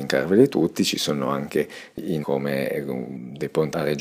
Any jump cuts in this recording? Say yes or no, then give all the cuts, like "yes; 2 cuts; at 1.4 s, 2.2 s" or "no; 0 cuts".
yes; 1 cut; at 2.2 s